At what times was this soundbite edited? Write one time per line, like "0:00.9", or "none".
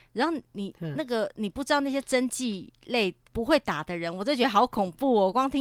0:03.3